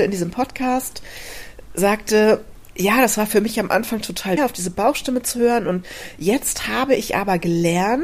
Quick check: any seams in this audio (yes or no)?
yes